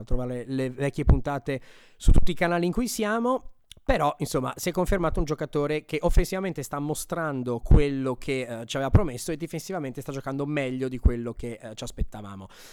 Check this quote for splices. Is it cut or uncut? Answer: uncut